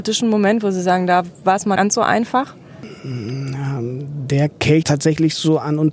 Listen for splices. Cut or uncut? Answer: cut